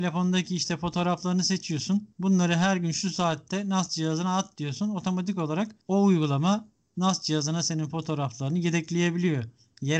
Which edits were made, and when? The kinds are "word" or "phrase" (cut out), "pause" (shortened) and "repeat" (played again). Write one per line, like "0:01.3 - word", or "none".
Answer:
none

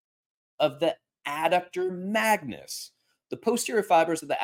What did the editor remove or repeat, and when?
none

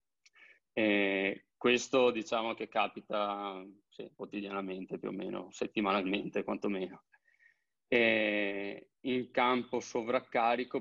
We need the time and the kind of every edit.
0:01.5 - pause
0:04.1 - pause
0:09.0 - pause

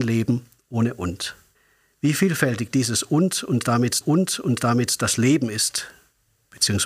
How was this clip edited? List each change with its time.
0:01.6 - pause
0:04.0 - repeat

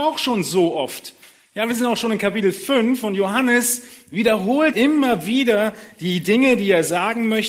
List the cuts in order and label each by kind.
0:04.7 - word

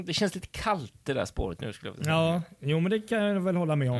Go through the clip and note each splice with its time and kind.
0:01.6 - word

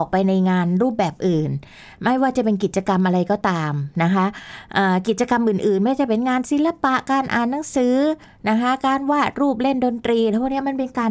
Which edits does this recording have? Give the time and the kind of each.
none

